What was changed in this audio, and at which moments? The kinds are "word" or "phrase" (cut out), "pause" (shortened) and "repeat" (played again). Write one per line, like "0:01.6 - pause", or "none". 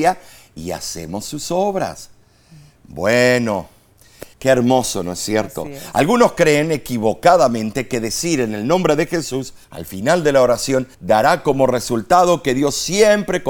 0:04.3 - pause
0:09.6 - pause
0:10.9 - pause